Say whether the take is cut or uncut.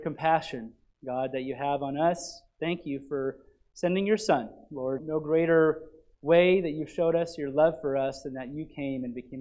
cut